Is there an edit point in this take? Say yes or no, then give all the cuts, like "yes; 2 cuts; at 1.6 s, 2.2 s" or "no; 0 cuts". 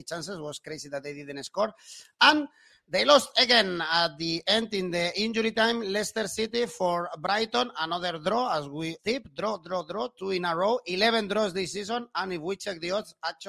yes; 1 cut; at 9.0 s